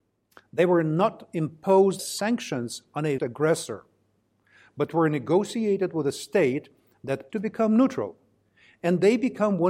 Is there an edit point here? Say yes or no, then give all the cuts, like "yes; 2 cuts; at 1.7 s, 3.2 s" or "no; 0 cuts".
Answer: yes; 3 cuts; at 2.0 s, 3.2 s, 7.3 s